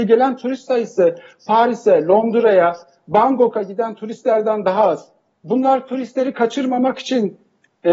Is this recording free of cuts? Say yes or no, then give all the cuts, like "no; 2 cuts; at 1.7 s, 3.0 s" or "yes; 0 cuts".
yes; 0 cuts